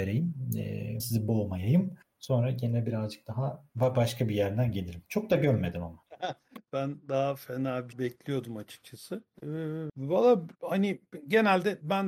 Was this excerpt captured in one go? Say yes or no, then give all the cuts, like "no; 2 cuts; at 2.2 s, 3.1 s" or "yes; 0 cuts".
no; 7 cuts; at 1.0 s, 2.0 s, 3.7 s, 4.7 s, 6.7 s, 7.9 s, 10.5 s